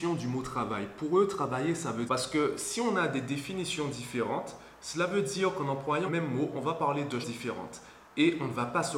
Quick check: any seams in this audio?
yes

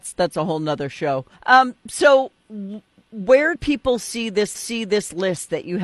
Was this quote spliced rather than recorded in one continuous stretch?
yes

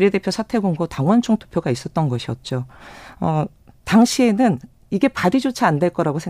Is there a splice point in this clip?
no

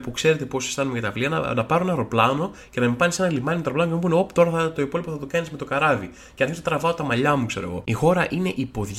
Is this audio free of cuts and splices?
yes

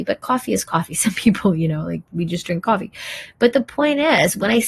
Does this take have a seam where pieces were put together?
no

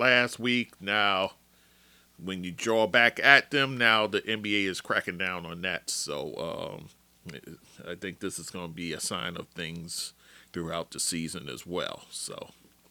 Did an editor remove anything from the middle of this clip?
no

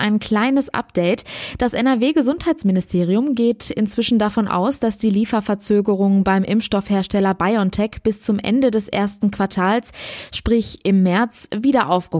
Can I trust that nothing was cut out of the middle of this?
yes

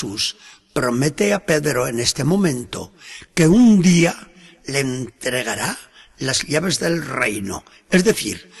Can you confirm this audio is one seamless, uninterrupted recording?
yes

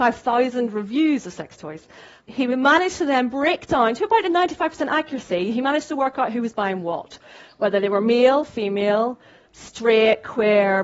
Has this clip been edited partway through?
no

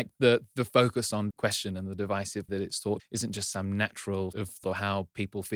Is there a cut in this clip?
yes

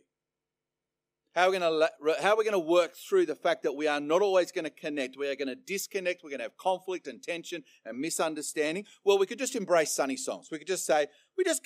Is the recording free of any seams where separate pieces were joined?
yes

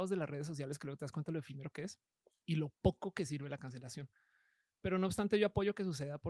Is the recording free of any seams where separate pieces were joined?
yes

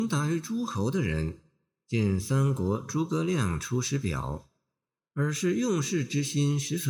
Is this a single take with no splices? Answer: yes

